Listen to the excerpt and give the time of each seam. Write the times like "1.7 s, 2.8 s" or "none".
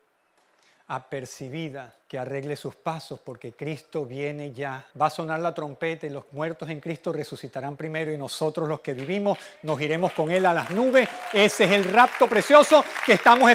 2.0 s, 4.9 s